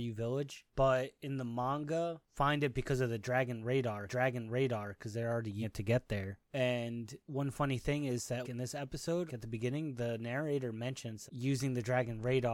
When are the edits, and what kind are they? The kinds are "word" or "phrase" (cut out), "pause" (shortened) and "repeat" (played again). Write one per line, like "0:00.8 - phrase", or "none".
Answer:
0:02.3 - word
0:04.1 - repeat
0:05.6 - word
0:08.4 - word
0:09.3 - word
0:11.3 - phrase